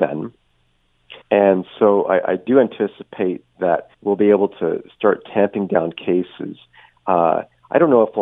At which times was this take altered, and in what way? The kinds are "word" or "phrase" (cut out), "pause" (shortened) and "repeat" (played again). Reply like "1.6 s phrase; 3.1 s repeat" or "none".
1.2 s pause; 3.9 s pause